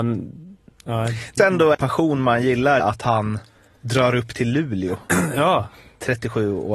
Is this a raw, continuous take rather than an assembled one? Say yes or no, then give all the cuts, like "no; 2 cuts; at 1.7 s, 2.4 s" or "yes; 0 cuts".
no; 3 cuts; at 1.4 s, 1.7 s, 2.8 s